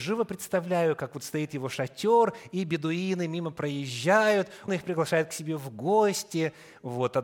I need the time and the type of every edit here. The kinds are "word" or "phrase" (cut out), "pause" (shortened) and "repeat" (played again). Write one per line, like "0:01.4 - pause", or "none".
0:04.7 - word